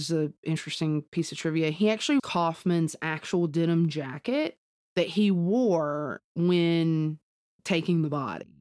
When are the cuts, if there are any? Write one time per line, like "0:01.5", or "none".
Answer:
0:02.2
0:04.8